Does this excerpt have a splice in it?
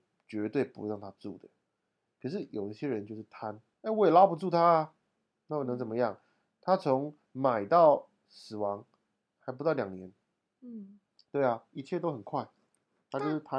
yes; 1 cut; at 3.7 s

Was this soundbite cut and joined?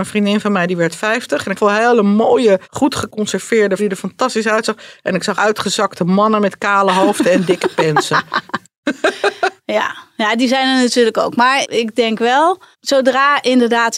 yes; 6 cuts; at 1.6 s, 2.6 s, 3.8 s, 5.4 s, 11.6 s, 12.7 s

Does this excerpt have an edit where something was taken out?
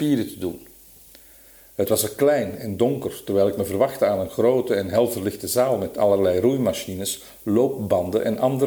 no; 0 cuts

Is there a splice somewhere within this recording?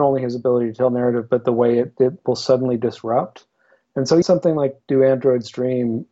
yes; 1 cut; at 4.2 s

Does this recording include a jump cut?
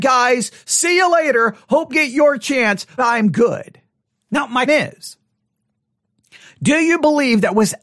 yes; 4 cuts; at 1.9 s, 3.0 s, 4.1 s, 4.7 s

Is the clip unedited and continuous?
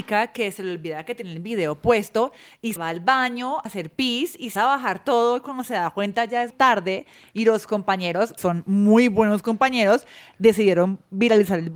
no; 5 cuts; at 2.8 s, 3.7 s, 4.6 s, 6.5 s, 8.4 s

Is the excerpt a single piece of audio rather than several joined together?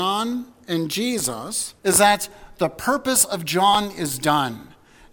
no; 1 cut; at 1.8 s

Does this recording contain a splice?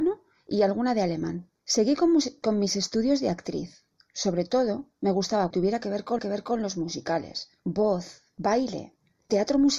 yes; 4 cuts; at 1.6 s, 5.5 s, 6.2 s, 7.6 s

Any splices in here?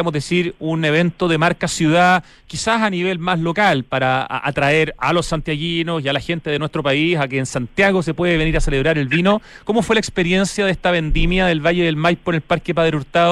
no; 0 cuts

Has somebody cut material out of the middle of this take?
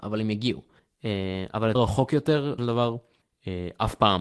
yes; 2 cuts; at 1.8 s, 2.6 s

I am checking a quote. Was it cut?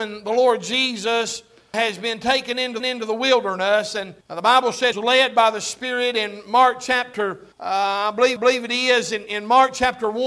yes; 7 cuts; at 1.7 s, 2.8 s, 4.2 s, 4.9 s, 7.5 s, 8.4 s, 9.3 s

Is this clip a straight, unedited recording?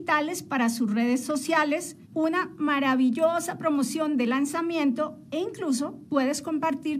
no; 1 cut; at 2.0 s

